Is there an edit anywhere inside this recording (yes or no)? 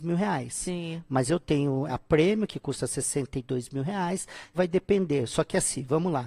yes